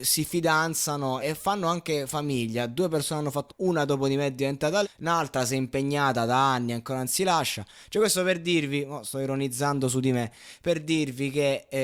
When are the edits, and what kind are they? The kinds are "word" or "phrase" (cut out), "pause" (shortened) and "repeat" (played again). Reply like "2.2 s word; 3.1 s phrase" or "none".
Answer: 1.2 s word; 3.5 s word; 4.8 s word